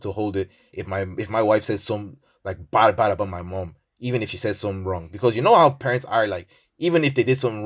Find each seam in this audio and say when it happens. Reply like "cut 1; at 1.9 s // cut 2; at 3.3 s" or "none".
none